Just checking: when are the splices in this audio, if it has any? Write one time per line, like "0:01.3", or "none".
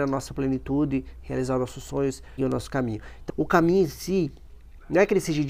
0:02.4
0:03.3